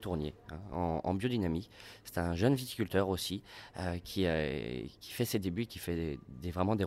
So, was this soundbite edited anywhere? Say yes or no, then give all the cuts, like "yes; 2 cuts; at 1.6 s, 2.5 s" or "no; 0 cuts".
no; 0 cuts